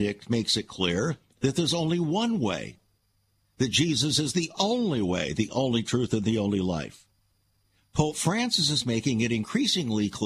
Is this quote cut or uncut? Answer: uncut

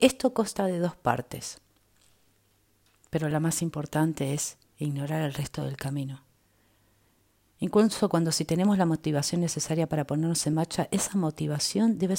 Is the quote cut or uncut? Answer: uncut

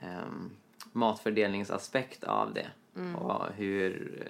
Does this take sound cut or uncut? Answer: uncut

